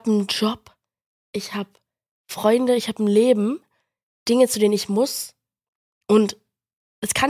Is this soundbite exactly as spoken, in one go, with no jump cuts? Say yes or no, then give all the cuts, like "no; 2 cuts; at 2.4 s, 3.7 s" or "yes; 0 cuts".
yes; 0 cuts